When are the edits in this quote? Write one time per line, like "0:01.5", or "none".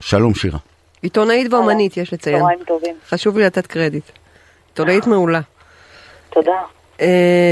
none